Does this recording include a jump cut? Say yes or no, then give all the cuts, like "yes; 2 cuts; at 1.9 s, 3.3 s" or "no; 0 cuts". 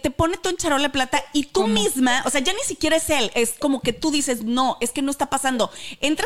no; 0 cuts